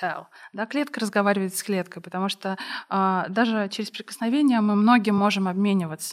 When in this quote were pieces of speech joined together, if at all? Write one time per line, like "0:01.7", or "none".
none